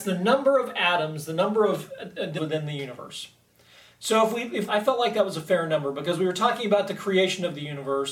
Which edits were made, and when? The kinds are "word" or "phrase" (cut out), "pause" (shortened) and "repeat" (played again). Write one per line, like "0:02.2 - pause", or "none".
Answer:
0:02.4 - phrase
0:04.7 - phrase